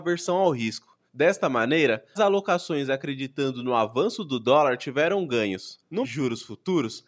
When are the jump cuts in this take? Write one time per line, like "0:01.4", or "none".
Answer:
0:01.1
0:02.2
0:06.0